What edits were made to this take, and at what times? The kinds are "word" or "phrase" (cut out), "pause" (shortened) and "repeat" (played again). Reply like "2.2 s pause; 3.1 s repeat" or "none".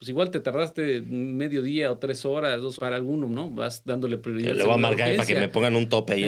2.8 s word